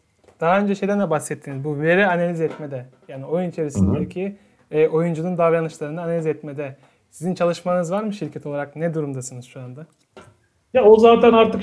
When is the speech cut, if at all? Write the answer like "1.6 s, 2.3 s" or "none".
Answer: none